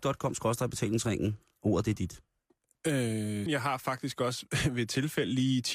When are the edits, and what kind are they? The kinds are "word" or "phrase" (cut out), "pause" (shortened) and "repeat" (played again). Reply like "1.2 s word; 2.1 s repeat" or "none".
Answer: 3.5 s word

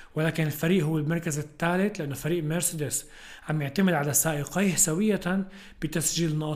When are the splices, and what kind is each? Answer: none

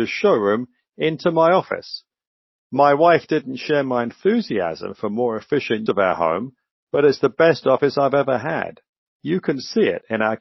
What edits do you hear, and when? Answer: 5.9 s word

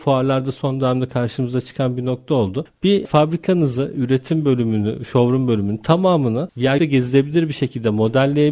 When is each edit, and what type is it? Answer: 6.8 s word

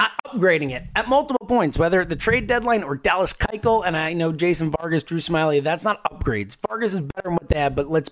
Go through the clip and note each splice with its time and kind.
none

